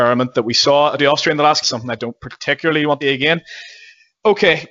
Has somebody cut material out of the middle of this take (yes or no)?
yes